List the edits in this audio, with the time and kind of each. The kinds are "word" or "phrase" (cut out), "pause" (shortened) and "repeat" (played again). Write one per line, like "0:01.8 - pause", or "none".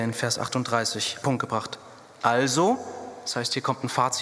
0:01.2 - phrase